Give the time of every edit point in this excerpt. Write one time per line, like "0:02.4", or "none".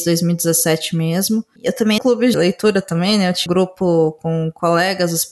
0:02.0
0:02.3
0:03.5